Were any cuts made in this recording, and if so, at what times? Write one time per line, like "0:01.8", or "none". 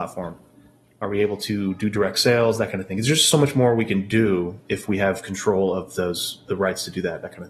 none